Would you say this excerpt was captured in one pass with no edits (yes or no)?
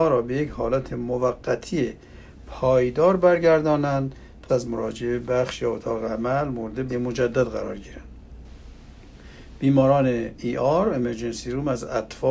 no